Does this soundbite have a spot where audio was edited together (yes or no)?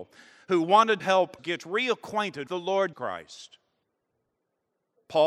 yes